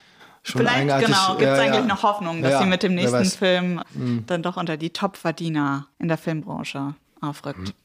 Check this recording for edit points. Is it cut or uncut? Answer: cut